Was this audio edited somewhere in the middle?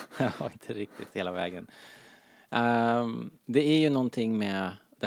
yes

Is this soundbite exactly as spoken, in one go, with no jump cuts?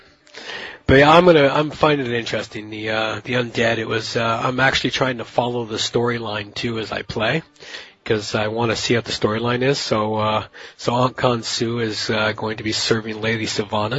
yes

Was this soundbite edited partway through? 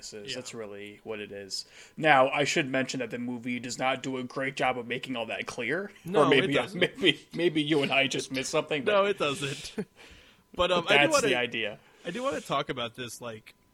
no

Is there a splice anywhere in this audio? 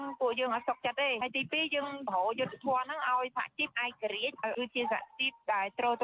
yes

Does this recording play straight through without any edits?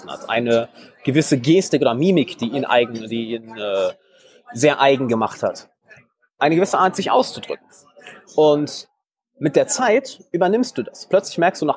yes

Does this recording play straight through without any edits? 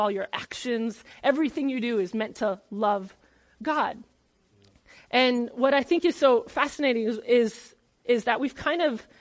yes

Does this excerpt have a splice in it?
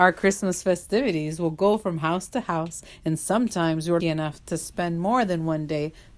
yes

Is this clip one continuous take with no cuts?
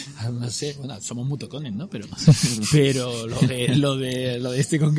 yes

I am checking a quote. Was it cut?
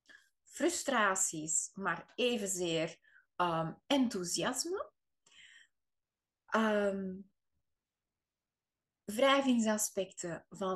no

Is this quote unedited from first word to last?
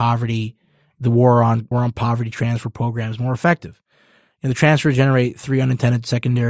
no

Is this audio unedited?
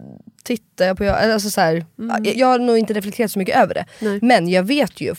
yes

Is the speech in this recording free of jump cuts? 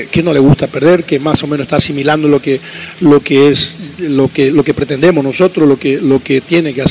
yes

